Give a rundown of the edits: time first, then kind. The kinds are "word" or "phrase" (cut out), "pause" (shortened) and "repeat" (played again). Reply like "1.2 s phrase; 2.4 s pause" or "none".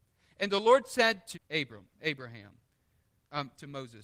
1.3 s word